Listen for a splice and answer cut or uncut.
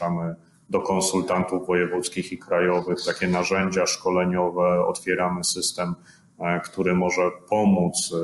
uncut